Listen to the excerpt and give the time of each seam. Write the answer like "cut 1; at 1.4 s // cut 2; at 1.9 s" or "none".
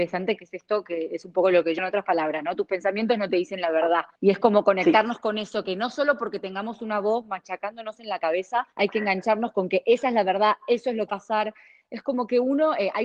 cut 1; at 1.8 s // cut 2; at 4.2 s // cut 3; at 8.7 s // cut 4; at 11.1 s

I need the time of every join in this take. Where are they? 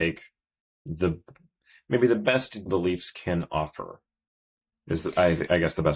cut 1; at 2.7 s

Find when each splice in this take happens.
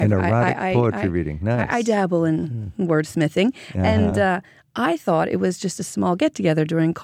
none

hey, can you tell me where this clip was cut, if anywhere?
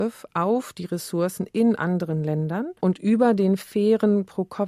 cut 1; at 2.8 s

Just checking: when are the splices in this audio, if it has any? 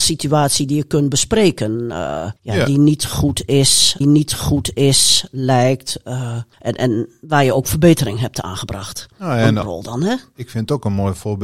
cut 1; at 2.4 s // cut 2; at 4.0 s // cut 3; at 6.5 s // cut 4; at 9.6 s

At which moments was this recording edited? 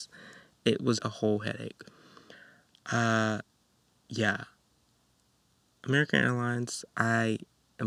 cut 1; at 0.9 s

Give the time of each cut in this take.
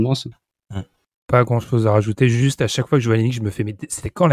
none

